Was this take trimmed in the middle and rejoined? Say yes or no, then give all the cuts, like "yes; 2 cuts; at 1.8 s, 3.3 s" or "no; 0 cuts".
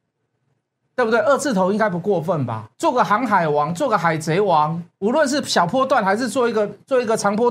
yes; 2 cuts; at 2.7 s, 4.9 s